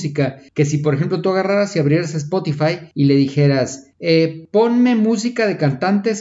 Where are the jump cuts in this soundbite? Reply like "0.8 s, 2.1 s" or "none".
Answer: none